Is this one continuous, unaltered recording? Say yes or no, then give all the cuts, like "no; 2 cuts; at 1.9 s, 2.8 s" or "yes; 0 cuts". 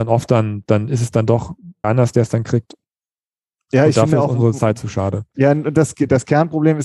no; 1 cut; at 1.8 s